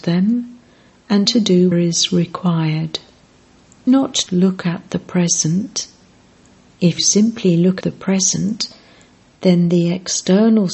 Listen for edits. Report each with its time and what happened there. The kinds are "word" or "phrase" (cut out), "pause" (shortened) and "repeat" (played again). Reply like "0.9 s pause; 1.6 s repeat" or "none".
1.3 s word; 1.7 s word; 3.9 s word; 4.3 s word; 7.0 s word; 7.8 s word